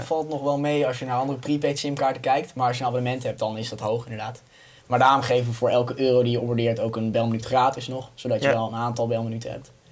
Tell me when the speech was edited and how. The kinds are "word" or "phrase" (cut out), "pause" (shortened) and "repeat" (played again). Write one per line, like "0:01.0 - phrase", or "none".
none